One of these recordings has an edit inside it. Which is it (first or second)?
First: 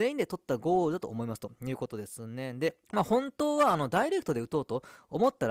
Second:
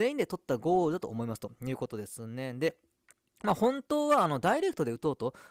first